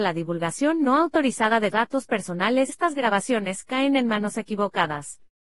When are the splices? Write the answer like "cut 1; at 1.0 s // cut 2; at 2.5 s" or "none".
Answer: cut 1; at 1.7 s // cut 2; at 2.7 s

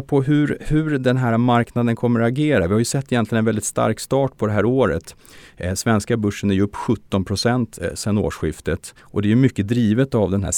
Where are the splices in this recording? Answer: cut 1; at 9.0 s

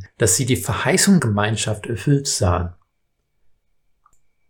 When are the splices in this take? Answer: cut 1; at 1.2 s

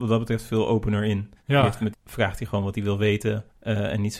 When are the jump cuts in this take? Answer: cut 1; at 1.9 s

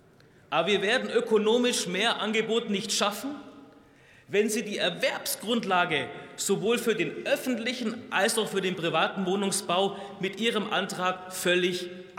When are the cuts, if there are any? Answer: none

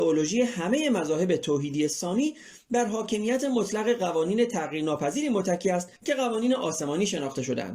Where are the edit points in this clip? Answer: cut 1; at 6.0 s

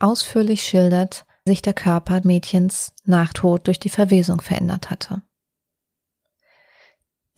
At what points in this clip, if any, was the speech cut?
cut 1; at 1.5 s // cut 2; at 2.2 s // cut 3; at 3.3 s

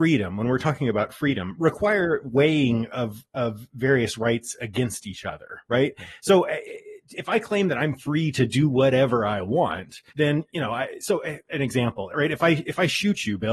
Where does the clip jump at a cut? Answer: cut 1; at 10.1 s

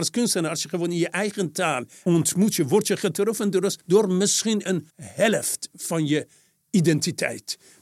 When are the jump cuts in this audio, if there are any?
cut 1; at 2.1 s // cut 2; at 3.8 s // cut 3; at 4.9 s

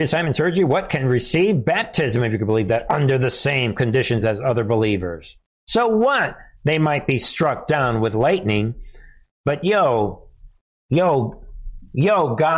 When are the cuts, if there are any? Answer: none

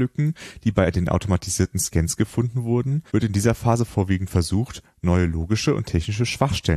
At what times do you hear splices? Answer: cut 1; at 3.1 s

